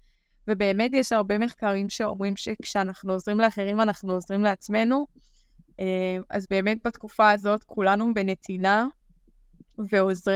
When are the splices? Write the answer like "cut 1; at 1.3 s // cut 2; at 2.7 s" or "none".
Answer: none